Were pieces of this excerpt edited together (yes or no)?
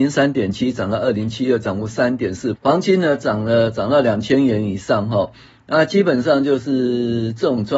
yes